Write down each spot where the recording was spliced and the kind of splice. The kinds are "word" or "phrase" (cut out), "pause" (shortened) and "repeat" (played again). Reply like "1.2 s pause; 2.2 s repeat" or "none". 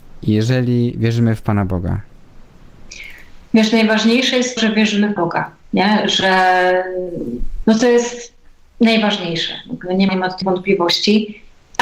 4.6 s word; 5.2 s word; 7.6 s phrase; 10.1 s word; 10.4 s word